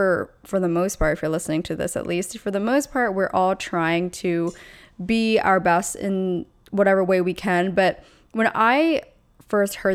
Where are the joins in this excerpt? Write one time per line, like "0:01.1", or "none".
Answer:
none

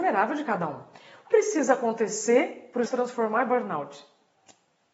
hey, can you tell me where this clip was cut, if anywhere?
0:01.3
0:02.9

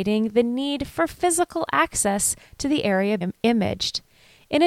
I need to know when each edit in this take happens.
0:03.2

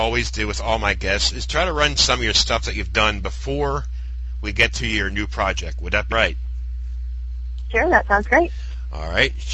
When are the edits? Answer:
0:02.0
0:06.1

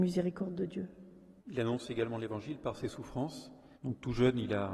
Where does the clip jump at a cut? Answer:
0:01.4
0:03.7

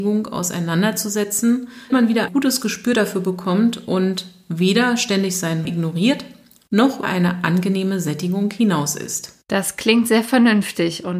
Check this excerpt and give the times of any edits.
0:01.9
0:02.3
0:05.6
0:07.0

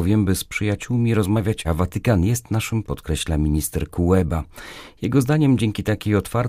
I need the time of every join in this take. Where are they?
0:01.6
0:02.8

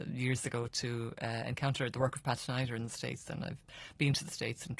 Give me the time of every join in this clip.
none

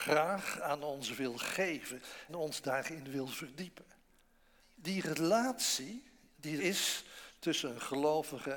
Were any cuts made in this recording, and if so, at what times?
0:02.3
0:06.6

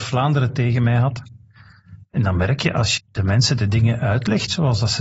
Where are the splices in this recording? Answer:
0:03.0

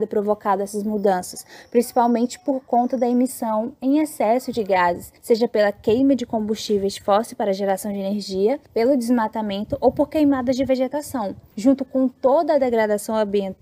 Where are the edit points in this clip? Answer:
0:08.7

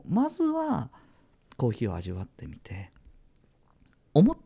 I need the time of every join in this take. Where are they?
none

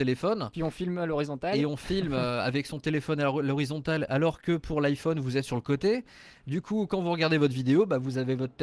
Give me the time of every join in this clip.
none

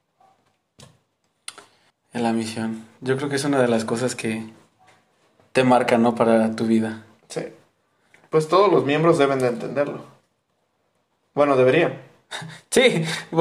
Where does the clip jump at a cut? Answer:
0:01.9

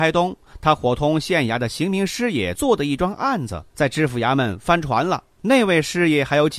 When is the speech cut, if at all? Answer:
0:05.3

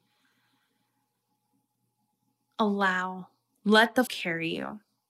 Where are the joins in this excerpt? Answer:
0:04.1

